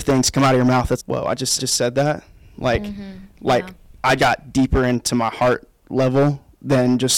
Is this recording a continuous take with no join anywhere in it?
no; 3 cuts; at 1.0 s, 1.6 s, 4.2 s

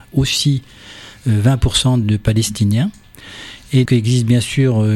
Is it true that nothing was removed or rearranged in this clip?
no; 2 cuts; at 2.0 s, 3.9 s

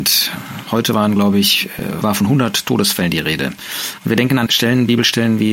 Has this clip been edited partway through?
yes; 2 cuts; at 2.0 s, 4.5 s

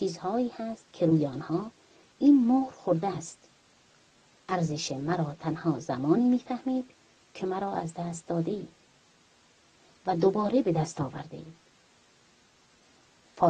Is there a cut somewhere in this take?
no; 0 cuts

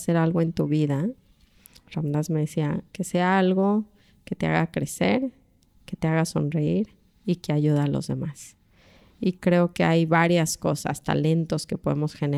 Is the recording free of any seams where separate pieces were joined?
yes; 0 cuts

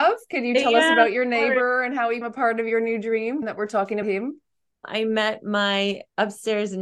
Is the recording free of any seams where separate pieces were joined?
no; 3 cuts; at 2.2 s, 3.4 s, 4.0 s

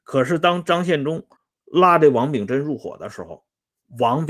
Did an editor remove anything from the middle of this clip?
yes; 1 cut; at 1.4 s

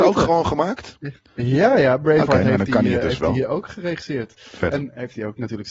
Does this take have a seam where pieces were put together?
no; 0 cuts

